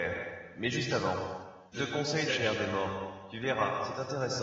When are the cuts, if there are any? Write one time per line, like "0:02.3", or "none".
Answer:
0:01.7
0:02.3